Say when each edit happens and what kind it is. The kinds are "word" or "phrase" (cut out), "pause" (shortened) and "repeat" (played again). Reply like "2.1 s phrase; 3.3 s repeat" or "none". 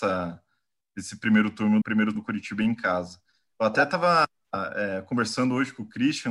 1.8 s word; 2.2 s word